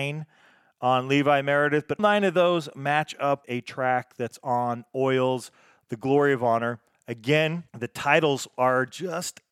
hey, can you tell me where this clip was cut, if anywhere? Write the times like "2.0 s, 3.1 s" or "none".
2.0 s, 3.4 s, 7.7 s